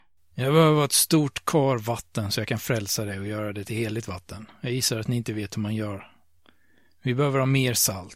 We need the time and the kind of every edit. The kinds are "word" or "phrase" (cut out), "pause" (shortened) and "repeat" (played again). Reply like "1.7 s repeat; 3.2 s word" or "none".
none